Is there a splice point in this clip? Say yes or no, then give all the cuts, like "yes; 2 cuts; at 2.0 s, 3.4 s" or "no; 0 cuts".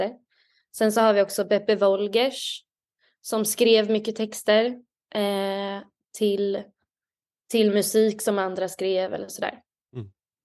no; 0 cuts